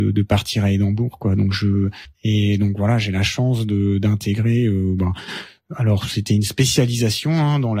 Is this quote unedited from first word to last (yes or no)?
yes